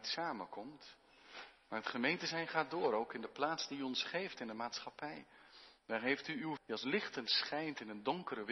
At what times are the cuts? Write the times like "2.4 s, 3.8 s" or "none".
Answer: 6.6 s